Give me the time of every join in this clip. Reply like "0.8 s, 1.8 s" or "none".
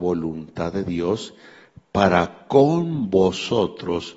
none